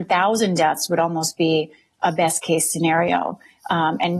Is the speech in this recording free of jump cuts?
yes; 0 cuts

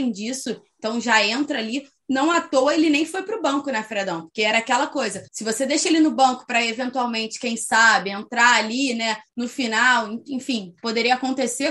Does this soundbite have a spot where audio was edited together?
yes; 2 cuts; at 5.3 s, 9.3 s

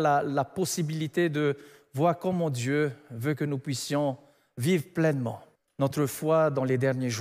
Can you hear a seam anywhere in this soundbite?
no; 0 cuts

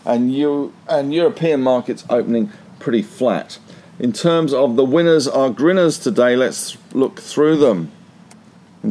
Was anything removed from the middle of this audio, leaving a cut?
no; 0 cuts

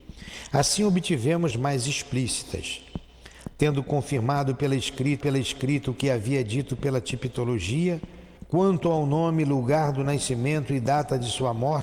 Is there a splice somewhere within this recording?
yes; 3 cuts; at 1.5 s, 5.2 s, 8.4 s

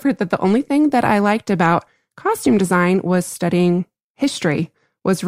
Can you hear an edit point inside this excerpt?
no; 0 cuts

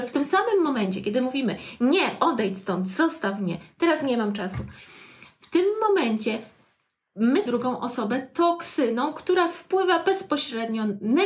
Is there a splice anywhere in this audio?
yes; 1 cut; at 7.5 s

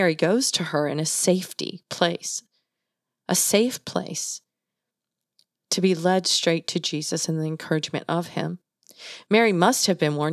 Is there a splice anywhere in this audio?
no; 0 cuts

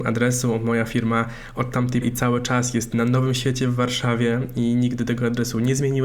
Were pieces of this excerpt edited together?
yes; 1 cut; at 2.0 s

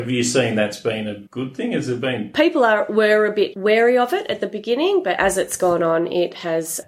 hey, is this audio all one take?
no; 1 cut; at 1.3 s

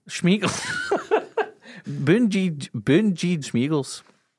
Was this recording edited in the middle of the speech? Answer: yes; 2 cuts; at 1.8 s, 3.4 s

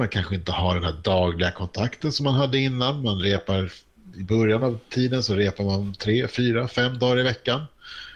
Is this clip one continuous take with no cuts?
yes; 0 cuts

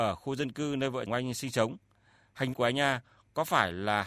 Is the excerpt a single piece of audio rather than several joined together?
no; 2 cuts; at 1.1 s, 2.5 s

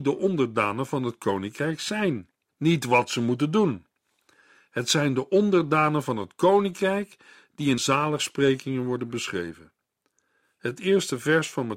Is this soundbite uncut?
no; 2 cuts; at 2.5 s, 7.8 s

